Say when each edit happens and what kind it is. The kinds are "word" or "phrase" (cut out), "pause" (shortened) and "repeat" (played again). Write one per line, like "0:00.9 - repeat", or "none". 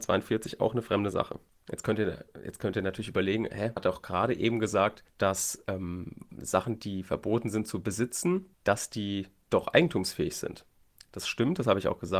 0:03.8 - word